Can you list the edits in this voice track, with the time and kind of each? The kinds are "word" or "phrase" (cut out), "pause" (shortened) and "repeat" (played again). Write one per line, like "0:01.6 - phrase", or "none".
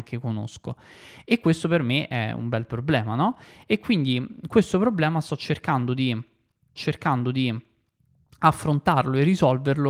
0:06.8 - repeat